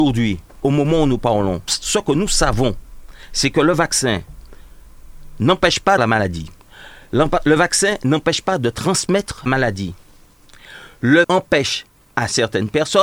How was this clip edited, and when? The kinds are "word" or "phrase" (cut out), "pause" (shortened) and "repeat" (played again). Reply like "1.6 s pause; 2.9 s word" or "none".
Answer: 1.7 s word; 6.0 s word; 9.5 s word; 11.2 s word